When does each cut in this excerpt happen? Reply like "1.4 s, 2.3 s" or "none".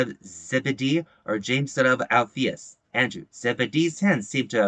2.8 s